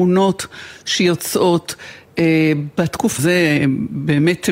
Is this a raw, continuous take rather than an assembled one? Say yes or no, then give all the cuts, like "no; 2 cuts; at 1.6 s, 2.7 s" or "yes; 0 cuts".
no; 1 cut; at 3.2 s